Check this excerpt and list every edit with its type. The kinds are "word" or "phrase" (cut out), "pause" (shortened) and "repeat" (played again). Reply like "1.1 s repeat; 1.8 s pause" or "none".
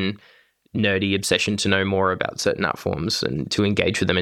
none